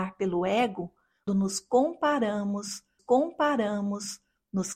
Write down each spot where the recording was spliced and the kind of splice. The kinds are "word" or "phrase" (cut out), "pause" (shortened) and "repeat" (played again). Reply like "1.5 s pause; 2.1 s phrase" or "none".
1.3 s word; 3.0 s repeat